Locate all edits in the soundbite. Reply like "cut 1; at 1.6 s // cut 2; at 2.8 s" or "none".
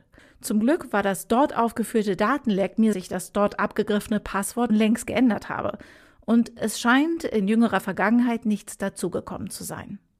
cut 1; at 2.9 s // cut 2; at 4.7 s